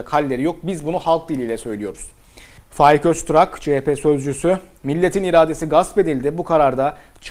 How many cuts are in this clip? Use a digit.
1